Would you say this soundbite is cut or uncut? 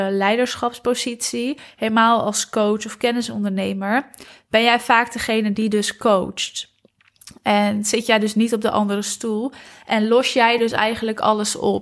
uncut